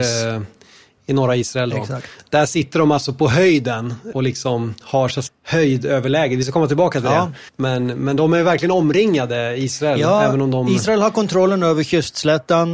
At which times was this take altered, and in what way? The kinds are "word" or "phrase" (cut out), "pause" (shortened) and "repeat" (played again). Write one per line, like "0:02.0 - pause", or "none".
0:04.1 - word
0:05.3 - word
0:07.5 - pause